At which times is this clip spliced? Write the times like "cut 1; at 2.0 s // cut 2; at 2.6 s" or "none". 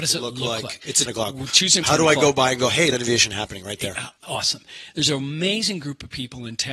cut 1; at 1.1 s // cut 2; at 1.8 s // cut 3; at 2.9 s // cut 4; at 4.2 s